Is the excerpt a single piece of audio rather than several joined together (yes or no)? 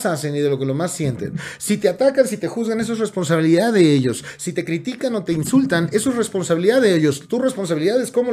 yes